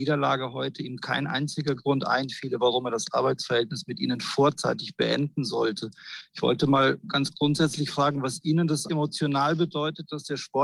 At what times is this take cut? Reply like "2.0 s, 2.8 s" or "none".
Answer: 8.9 s